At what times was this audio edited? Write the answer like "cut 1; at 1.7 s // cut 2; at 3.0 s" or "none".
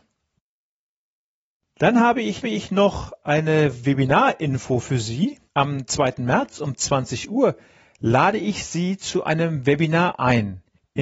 cut 1; at 2.4 s // cut 2; at 5.5 s